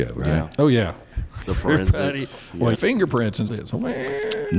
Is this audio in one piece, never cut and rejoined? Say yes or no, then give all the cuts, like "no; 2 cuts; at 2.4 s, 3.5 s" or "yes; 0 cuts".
no; 3 cuts; at 1.5 s, 2.7 s, 3.5 s